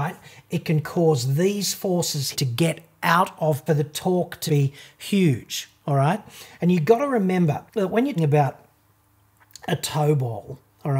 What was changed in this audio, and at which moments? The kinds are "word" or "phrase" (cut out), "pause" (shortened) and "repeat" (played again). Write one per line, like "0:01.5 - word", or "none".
0:02.3 - word
0:03.7 - phrase
0:04.5 - word
0:07.7 - pause
0:08.2 - word